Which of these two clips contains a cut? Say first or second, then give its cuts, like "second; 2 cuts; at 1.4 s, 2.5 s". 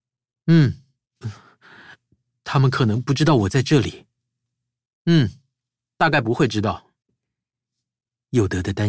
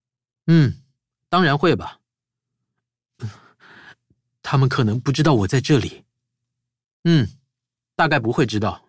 first; 2 cuts; at 1.0 s, 7.0 s